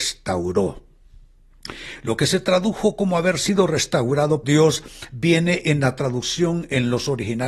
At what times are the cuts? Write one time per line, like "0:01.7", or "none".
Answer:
0:04.4